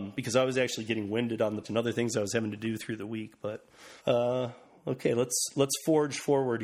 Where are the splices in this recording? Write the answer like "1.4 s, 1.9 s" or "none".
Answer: 1.6 s, 4.0 s